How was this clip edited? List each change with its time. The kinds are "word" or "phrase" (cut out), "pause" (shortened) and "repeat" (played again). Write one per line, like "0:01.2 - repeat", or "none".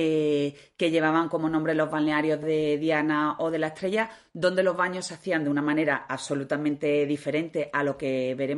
0:02.4 - word